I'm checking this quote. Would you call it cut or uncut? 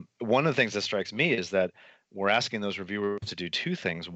uncut